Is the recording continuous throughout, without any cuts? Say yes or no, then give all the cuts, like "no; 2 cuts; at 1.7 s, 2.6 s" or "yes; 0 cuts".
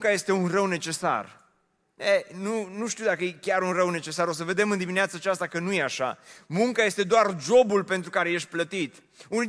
yes; 0 cuts